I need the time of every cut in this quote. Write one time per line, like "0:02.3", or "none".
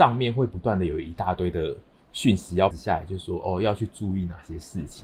0:02.7